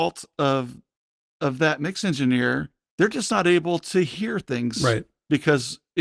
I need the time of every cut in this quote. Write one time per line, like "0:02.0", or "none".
none

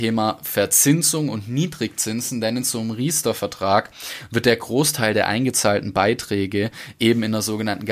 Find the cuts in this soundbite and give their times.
none

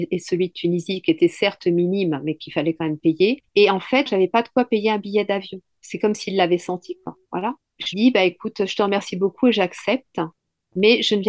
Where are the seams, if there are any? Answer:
0:03.5
0:04.1
0:07.2
0:07.9

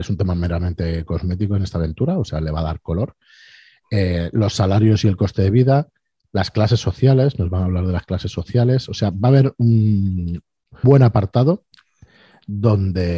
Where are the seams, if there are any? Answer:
0:10.8

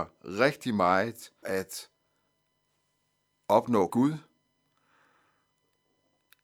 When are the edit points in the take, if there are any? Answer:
0:01.4
0:03.9

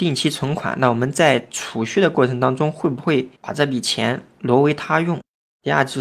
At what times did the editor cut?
0:03.4

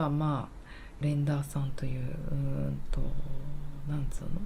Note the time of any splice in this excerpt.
0:01.0

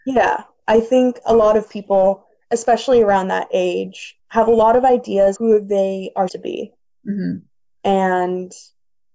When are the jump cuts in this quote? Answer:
0:04.2
0:05.4
0:06.3

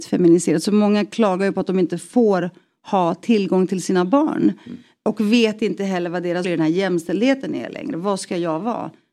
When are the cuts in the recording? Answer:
0:06.4

